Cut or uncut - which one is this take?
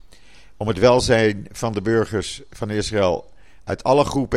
uncut